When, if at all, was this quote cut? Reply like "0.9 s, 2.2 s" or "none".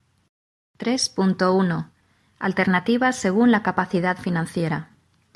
none